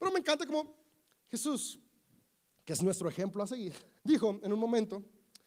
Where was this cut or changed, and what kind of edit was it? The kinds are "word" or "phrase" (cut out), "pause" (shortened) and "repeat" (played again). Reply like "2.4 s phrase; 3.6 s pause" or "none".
4.0 s pause